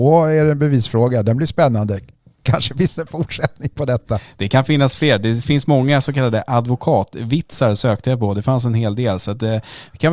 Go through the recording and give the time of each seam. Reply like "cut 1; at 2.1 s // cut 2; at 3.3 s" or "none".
none